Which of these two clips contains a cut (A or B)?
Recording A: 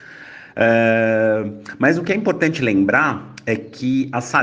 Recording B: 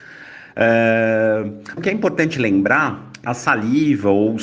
B